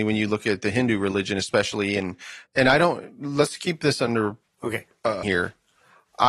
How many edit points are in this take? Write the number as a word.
three